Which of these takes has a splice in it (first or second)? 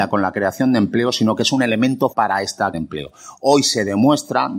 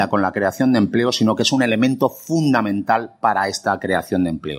first